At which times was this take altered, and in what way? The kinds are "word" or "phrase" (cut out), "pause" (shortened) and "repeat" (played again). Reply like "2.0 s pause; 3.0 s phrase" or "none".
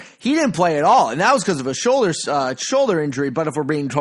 none